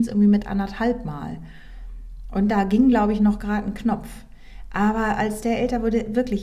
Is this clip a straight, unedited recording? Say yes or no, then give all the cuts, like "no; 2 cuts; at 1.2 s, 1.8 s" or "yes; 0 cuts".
yes; 0 cuts